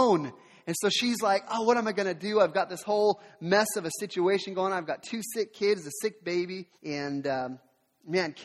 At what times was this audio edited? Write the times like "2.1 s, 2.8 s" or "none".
6.8 s